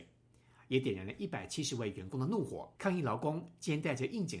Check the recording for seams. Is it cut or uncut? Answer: cut